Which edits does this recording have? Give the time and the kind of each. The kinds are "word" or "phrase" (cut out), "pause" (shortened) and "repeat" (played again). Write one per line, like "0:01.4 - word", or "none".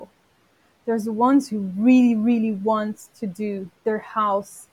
0:03.8 - pause